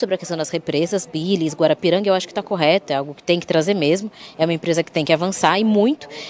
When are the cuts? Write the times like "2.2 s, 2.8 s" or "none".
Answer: none